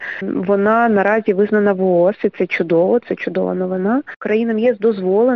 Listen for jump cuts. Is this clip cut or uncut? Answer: uncut